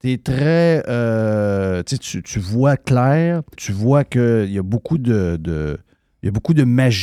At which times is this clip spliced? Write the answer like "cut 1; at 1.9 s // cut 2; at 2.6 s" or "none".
cut 1; at 3.6 s